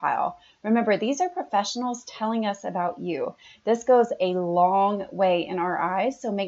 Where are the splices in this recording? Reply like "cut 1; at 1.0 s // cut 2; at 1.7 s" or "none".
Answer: none